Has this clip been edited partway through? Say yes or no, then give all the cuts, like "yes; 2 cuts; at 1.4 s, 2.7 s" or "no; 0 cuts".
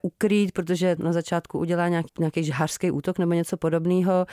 yes; 2 cuts; at 1.0 s, 2.1 s